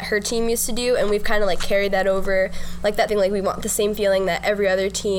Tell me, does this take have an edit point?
yes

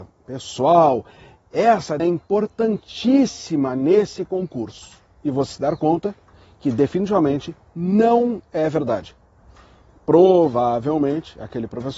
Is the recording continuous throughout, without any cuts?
no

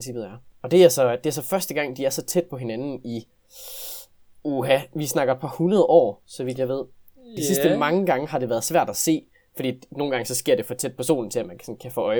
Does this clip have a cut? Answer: no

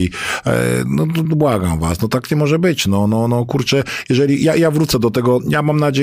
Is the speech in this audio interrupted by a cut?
no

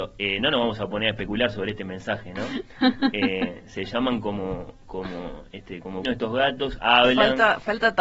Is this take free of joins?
no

